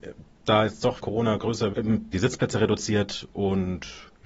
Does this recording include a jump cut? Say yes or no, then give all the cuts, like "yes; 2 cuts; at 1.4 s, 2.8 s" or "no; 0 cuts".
yes; 3 cuts; at 1.0 s, 1.7 s, 2.1 s